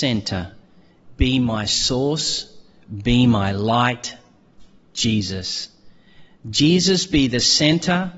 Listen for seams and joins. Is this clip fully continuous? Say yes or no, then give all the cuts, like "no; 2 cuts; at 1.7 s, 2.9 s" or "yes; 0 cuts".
yes; 0 cuts